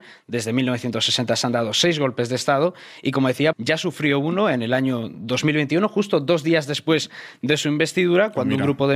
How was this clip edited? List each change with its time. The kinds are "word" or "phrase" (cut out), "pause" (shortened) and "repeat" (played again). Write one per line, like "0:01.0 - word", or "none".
0:03.5 - word